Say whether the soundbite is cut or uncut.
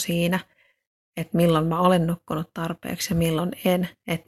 uncut